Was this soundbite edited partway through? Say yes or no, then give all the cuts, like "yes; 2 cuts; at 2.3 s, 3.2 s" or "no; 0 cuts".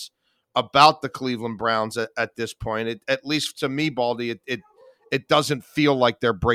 no; 0 cuts